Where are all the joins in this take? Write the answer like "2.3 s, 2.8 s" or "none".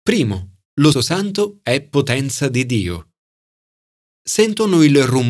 0.9 s